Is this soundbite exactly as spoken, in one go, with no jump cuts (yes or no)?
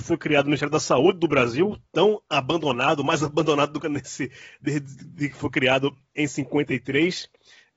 no